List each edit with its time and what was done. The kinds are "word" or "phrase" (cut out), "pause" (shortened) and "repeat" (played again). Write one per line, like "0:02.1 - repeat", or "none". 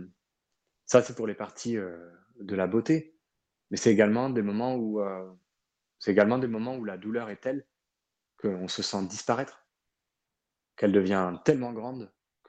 none